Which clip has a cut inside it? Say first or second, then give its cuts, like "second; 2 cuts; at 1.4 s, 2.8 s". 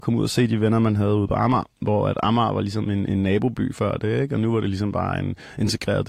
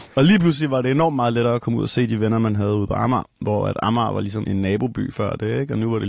second; 1 cut; at 4.4 s